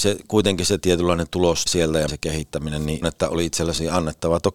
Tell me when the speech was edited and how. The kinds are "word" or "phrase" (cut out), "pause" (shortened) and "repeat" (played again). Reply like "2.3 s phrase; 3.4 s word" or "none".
1.7 s word; 2.1 s word; 3.0 s phrase